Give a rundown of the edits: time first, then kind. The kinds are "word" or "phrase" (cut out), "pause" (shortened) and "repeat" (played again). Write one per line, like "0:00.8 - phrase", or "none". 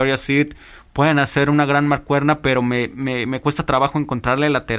none